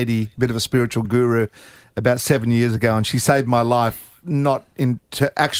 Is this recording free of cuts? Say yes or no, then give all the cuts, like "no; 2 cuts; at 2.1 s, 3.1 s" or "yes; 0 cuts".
yes; 0 cuts